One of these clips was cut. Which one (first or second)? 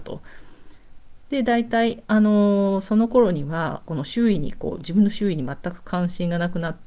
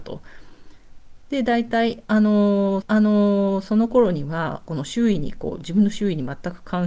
second